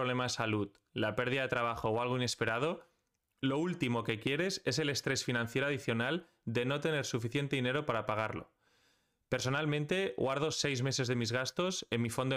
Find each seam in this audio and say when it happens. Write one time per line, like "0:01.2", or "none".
none